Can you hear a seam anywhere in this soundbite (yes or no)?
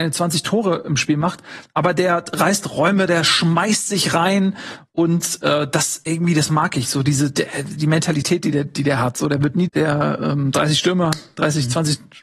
yes